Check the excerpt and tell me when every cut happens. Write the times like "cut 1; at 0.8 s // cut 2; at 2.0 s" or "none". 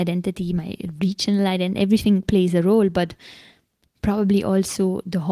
none